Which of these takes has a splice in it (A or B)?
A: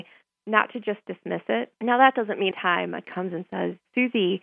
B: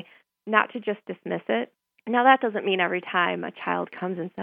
A